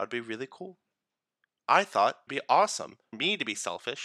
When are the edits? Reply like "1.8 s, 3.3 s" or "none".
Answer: 2.3 s, 3.1 s